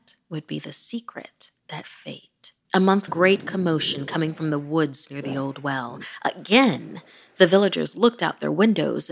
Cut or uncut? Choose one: cut